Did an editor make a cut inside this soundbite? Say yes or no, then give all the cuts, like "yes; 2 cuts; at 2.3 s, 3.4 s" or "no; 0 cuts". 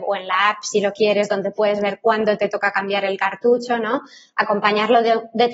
no; 0 cuts